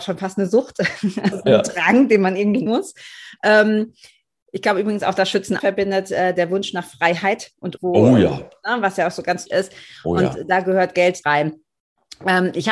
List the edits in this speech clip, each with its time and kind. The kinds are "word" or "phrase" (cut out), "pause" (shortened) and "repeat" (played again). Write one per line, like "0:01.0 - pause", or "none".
0:01.3 - word
0:02.7 - word
0:05.6 - word
0:07.8 - word
0:09.5 - word
0:11.2 - word